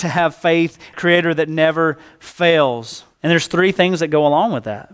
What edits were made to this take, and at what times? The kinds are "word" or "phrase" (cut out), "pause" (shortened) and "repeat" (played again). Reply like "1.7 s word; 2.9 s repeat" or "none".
0.9 s phrase; 3.1 s pause